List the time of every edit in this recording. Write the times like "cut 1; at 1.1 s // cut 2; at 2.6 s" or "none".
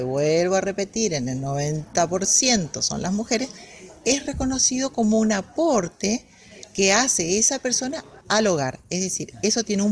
cut 1; at 8.2 s